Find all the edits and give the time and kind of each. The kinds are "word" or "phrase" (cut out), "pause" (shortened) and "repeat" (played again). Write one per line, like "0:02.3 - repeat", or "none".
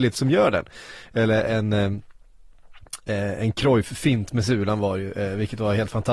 none